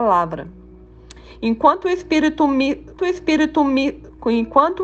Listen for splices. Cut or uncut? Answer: cut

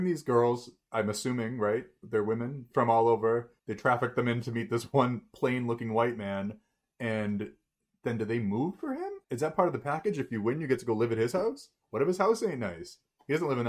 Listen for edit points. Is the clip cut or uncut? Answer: cut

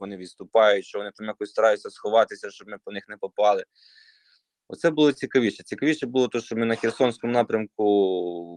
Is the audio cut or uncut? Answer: uncut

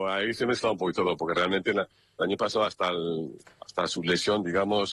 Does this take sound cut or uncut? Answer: uncut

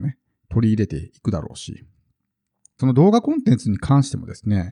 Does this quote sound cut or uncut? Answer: cut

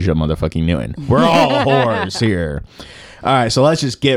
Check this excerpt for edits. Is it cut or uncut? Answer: uncut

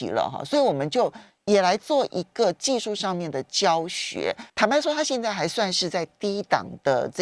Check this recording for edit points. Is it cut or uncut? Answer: cut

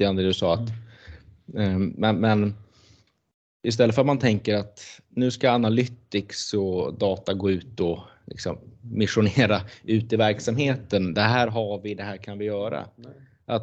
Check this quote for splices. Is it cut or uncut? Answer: uncut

